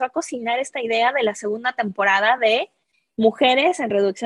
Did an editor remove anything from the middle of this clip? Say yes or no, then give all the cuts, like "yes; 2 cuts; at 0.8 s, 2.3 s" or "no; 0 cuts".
no; 0 cuts